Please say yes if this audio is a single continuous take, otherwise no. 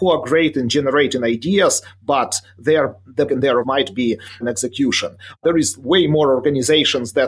no